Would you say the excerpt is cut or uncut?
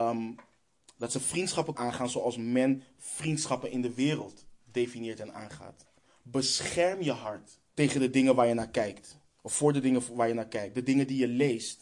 cut